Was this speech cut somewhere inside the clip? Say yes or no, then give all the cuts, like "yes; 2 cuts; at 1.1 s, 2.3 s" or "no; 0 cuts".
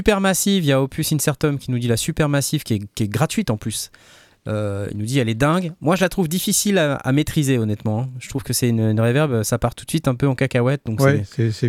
no; 0 cuts